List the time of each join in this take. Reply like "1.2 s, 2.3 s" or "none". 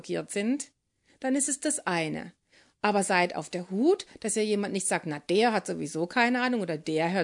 none